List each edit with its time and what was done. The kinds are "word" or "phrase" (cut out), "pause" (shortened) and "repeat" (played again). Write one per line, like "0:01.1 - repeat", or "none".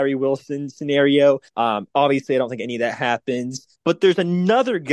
0:01.5 - pause
0:03.8 - pause